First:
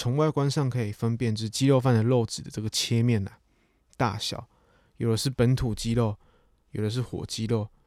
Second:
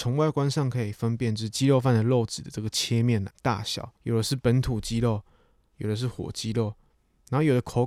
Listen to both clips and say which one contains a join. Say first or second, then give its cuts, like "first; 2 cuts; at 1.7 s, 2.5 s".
second; 2 cuts; at 3.3 s, 4.0 s